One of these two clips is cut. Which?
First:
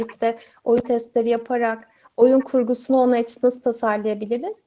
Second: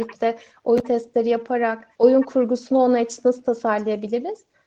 second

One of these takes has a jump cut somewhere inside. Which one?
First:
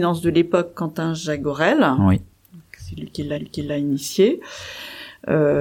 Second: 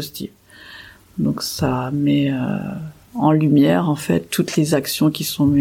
first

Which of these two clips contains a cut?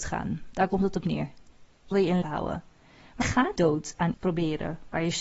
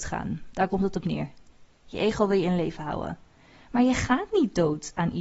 first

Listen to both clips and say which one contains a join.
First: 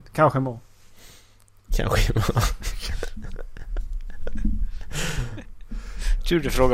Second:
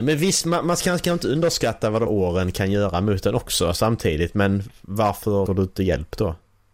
second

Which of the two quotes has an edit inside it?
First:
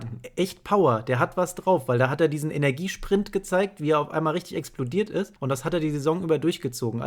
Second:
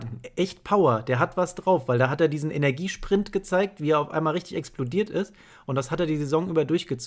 first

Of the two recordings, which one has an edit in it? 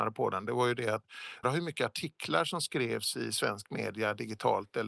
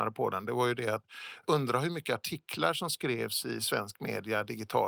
first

